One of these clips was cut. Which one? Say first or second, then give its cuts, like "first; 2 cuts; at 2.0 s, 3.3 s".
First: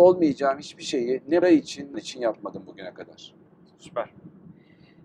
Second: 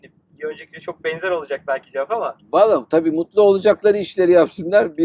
first; 2 cuts; at 1.4 s, 1.9 s